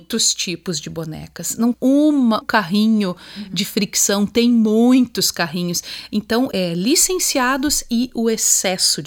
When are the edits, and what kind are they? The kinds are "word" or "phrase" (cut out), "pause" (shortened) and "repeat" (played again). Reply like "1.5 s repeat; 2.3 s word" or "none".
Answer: 1.7 s word; 2.4 s word; 6.5 s word